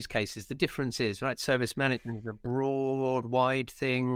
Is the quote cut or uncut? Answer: uncut